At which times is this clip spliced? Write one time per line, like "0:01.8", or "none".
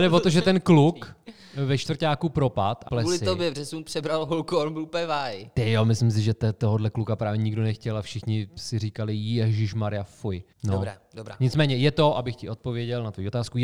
0:02.9
0:10.5